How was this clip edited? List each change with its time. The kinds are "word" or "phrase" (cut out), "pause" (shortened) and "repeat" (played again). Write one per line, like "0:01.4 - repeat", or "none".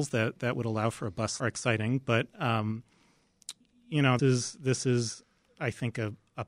0:01.4 - phrase
0:03.6 - pause
0:04.2 - word